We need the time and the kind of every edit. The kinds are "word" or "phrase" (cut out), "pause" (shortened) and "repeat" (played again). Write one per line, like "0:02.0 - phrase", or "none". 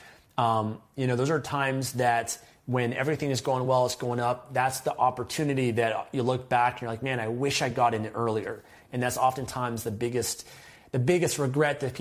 none